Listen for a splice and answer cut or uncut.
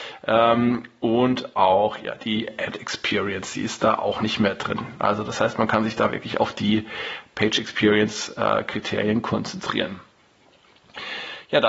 uncut